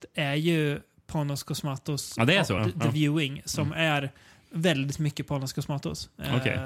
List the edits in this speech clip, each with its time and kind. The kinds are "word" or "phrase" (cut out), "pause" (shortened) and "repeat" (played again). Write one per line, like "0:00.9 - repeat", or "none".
0:02.6 - word